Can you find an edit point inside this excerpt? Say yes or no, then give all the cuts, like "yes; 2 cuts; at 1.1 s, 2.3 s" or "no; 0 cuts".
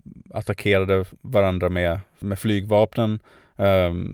yes; 1 cut; at 2.2 s